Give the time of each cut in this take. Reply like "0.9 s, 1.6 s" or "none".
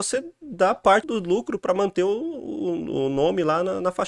1.0 s